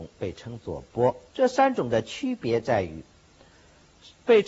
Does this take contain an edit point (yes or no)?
yes